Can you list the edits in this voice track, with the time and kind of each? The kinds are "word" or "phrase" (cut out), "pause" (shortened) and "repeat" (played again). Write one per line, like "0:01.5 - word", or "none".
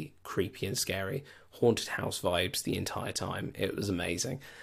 none